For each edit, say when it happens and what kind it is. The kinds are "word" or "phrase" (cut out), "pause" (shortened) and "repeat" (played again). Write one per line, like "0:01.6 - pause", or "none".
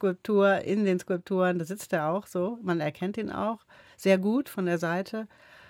none